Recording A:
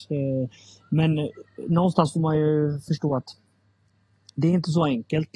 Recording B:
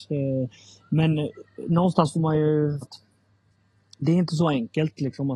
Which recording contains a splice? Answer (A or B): B